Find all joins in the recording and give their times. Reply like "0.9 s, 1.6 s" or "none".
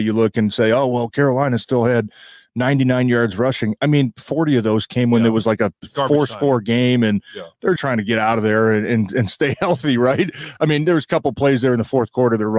7.8 s

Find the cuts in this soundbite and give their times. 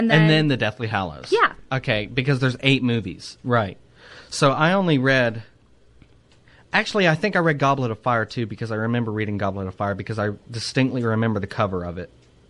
none

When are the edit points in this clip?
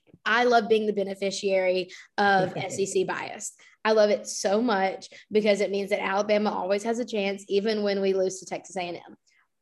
none

